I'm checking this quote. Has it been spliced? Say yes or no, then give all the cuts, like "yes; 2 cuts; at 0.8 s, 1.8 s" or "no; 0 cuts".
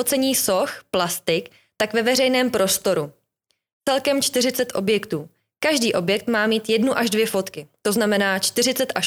no; 0 cuts